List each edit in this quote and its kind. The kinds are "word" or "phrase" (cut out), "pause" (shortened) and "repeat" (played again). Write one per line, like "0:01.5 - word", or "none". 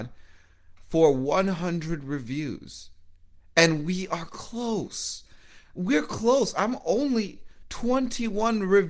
none